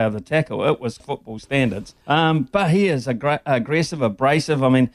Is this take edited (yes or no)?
yes